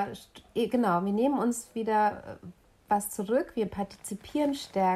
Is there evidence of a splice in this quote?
no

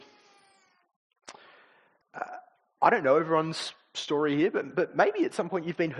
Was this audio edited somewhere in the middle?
no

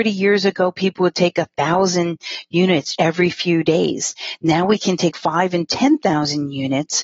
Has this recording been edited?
yes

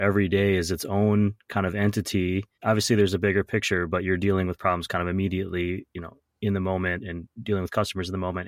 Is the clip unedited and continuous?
no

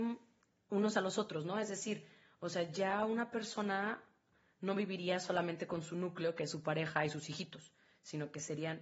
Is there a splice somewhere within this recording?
no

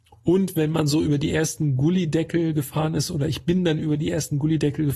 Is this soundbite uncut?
yes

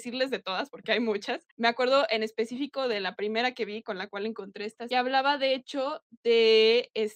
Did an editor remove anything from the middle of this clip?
yes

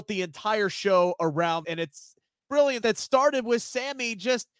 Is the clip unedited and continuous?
no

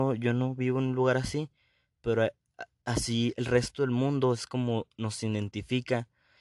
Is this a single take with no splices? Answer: yes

